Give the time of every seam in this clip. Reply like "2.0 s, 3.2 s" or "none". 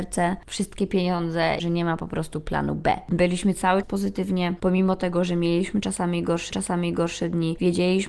1.6 s, 3.8 s, 4.6 s, 6.5 s

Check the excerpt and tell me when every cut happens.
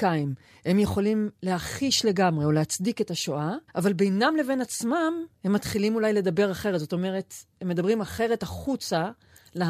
3.7 s

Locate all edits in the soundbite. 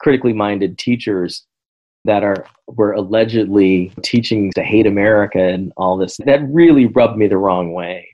2.1 s, 4.0 s, 4.5 s, 6.2 s

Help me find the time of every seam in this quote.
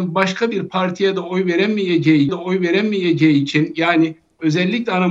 2.3 s

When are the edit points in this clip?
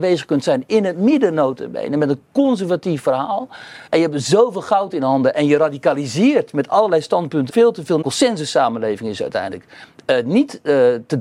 3.9 s, 7.5 s, 8.0 s

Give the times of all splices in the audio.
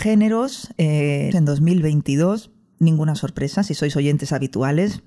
1.3 s, 2.7 s

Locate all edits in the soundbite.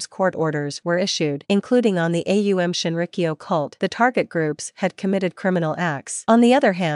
none

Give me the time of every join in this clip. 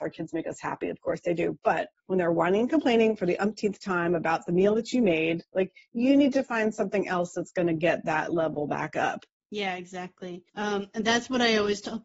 2.0 s, 9.3 s, 10.5 s

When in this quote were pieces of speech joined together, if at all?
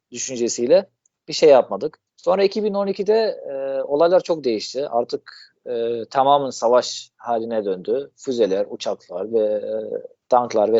2.1 s

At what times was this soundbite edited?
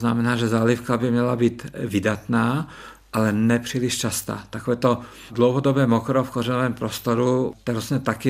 none

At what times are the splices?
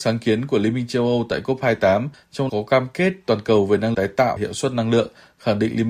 2.5 s, 3.9 s, 4.4 s

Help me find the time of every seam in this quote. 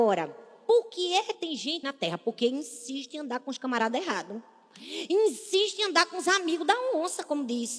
1.3 s, 1.8 s

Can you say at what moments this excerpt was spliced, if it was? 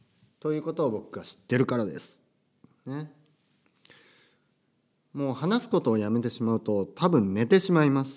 none

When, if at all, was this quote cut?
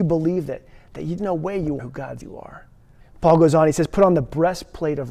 1.2 s, 1.8 s, 2.2 s, 3.0 s

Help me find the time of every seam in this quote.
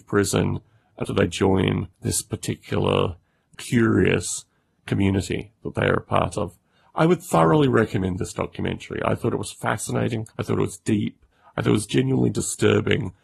1.0 s, 1.9 s, 3.5 s, 10.3 s

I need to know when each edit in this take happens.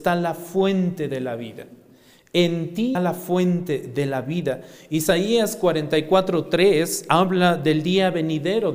2.9 s

